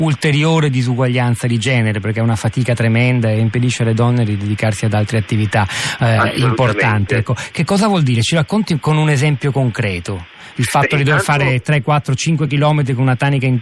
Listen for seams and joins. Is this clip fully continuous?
yes; 0 cuts

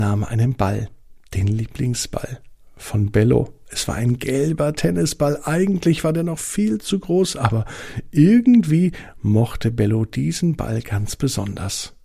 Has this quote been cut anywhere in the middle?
no; 0 cuts

